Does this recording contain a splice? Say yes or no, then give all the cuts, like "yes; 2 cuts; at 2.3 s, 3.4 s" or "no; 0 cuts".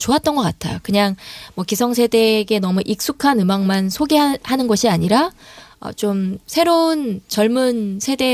no; 0 cuts